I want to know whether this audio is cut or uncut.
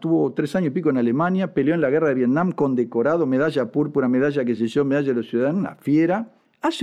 uncut